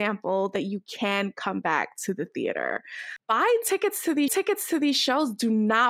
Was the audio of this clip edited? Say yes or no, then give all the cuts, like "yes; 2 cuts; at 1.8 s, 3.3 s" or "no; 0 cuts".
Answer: yes; 1 cut; at 4.3 s